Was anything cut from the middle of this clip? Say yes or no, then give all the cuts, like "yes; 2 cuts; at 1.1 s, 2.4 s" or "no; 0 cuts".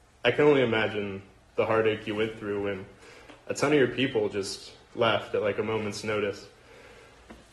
no; 0 cuts